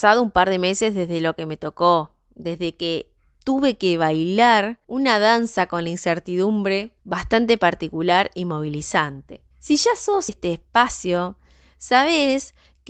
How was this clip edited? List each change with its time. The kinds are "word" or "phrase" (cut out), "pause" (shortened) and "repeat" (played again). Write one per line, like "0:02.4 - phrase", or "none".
0:04.8 - pause
0:07.0 - pause
0:09.5 - pause
0:10.3 - phrase